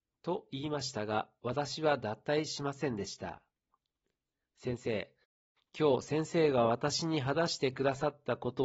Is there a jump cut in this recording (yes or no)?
no